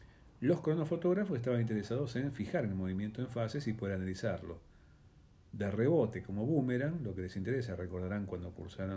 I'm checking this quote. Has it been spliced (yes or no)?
no